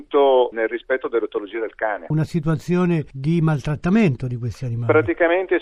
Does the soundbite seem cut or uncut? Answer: uncut